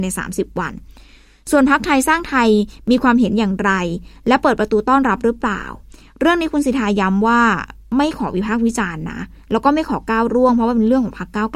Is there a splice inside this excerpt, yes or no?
no